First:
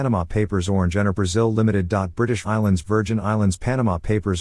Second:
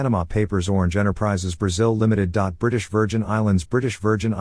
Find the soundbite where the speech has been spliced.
first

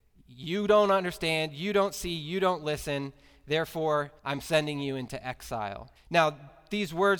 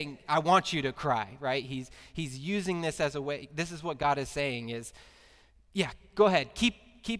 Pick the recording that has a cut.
first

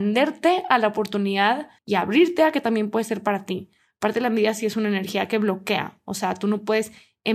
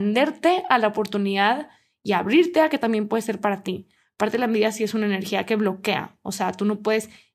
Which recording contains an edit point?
first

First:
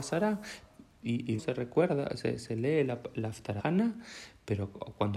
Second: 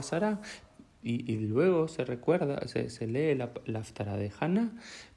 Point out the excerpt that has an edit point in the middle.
first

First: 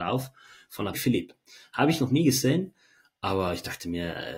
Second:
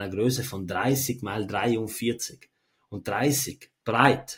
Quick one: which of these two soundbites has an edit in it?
first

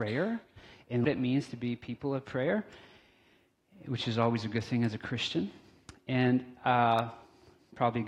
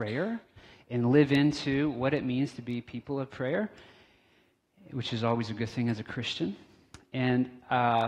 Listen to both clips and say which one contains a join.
first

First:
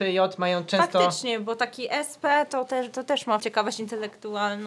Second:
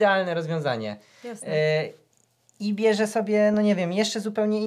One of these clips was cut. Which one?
first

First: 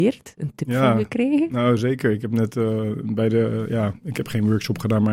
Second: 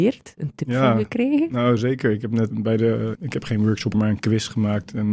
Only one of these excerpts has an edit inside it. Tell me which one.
second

